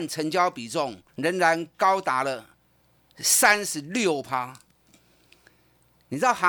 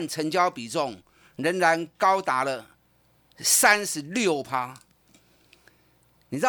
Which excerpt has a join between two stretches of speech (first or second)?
first